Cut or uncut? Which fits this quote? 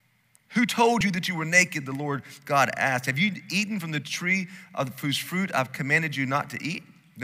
uncut